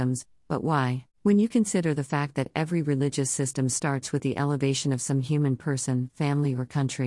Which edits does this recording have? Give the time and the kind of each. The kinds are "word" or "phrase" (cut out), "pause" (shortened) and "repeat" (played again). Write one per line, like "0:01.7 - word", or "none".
0:01.1 - pause